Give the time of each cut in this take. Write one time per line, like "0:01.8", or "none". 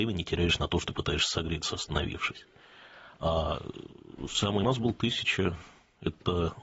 0:03.1
0:04.6

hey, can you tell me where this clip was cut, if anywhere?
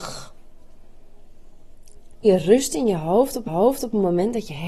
0:02.2
0:03.5

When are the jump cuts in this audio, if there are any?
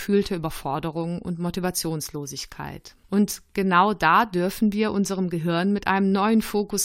0:03.0

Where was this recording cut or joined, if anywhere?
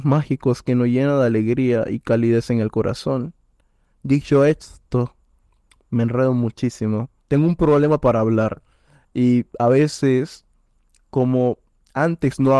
0:07.2
0:09.5

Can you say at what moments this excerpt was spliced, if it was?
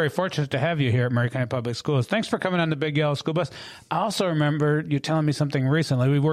none

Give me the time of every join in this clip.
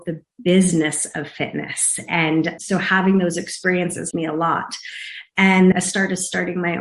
0:02.6
0:04.1
0:05.7

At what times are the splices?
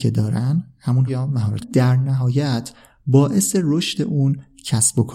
0:01.1
0:01.6

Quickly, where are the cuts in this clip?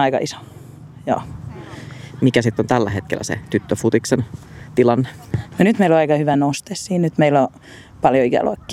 none

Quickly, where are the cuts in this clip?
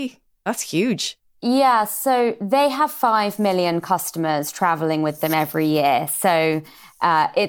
0:01.3

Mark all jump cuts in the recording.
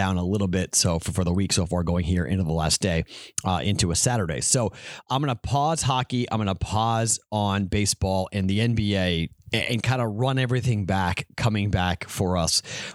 none

